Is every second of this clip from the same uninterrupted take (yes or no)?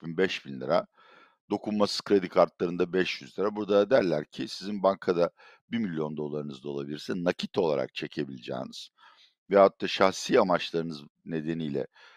yes